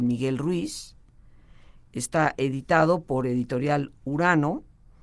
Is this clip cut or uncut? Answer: uncut